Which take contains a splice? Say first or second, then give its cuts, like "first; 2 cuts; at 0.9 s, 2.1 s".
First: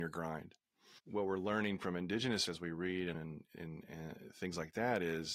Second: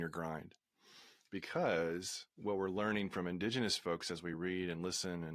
first; 3 cuts; at 1.0 s, 2.5 s, 3.1 s